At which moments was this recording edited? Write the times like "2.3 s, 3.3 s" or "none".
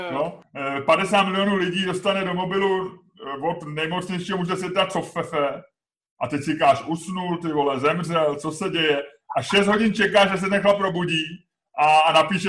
none